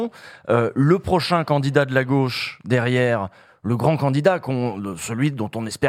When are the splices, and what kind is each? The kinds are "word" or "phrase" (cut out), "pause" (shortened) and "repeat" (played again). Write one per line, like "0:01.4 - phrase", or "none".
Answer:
none